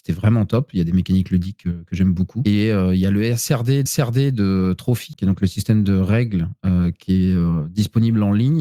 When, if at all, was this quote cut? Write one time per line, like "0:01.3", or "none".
0:03.9